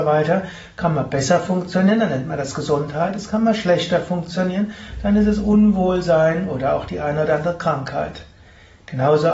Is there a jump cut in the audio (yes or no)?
no